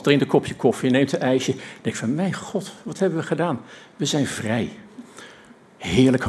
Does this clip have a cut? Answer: no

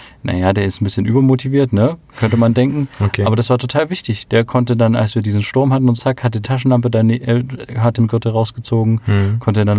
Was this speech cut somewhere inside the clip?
yes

